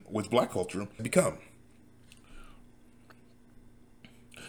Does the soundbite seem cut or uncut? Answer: cut